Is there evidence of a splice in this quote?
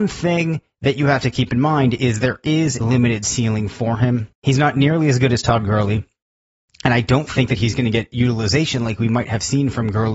yes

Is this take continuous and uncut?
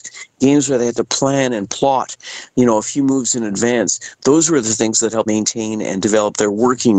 no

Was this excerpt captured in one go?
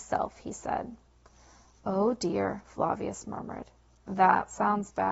yes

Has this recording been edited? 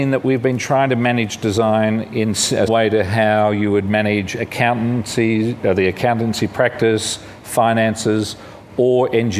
yes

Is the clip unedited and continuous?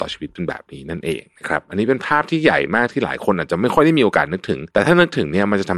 no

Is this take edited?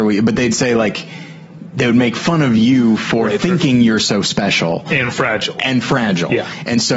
no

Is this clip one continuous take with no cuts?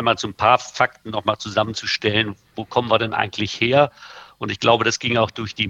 yes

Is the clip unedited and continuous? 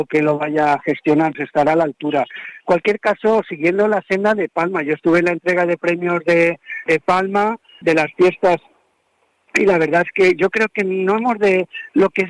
no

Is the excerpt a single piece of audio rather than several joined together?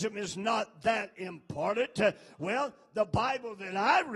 yes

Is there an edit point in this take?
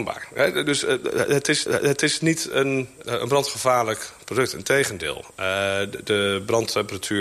yes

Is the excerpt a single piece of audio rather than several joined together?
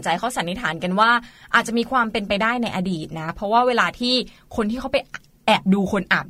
yes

